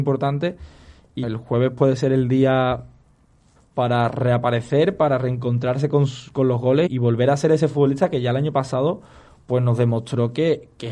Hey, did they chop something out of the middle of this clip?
yes; 3 cuts; at 1.2 s, 3.6 s, 6.9 s

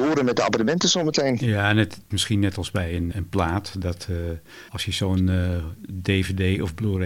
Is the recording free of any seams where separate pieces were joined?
no; 3 cuts; at 2.1 s, 3.1 s, 4.7 s

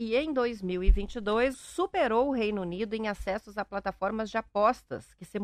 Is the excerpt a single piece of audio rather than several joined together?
no; 1 cut; at 1.5 s

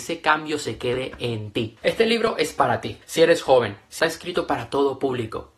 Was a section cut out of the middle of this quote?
yes; 2 cuts; at 3.0 s, 4.0 s

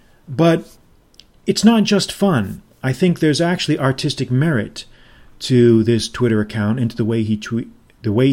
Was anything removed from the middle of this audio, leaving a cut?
no; 0 cuts

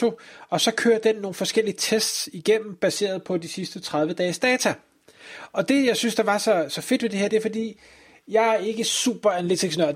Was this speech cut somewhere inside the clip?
no; 0 cuts

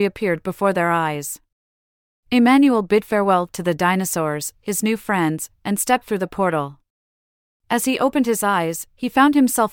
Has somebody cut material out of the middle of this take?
no; 0 cuts

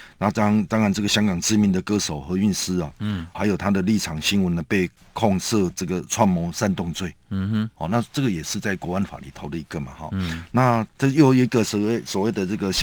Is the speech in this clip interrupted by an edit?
no; 0 cuts

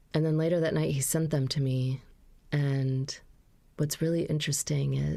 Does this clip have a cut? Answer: no; 0 cuts

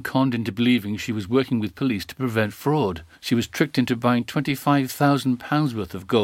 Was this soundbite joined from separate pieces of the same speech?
no; 0 cuts

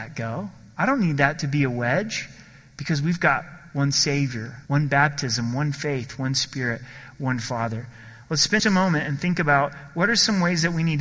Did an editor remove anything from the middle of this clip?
yes; 2 cuts; at 4.7 s, 8.6 s

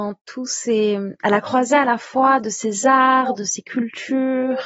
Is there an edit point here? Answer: no; 0 cuts

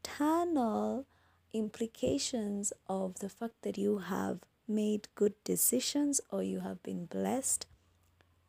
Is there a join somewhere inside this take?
no; 0 cuts

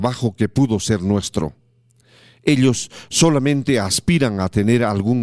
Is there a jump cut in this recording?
no; 0 cuts

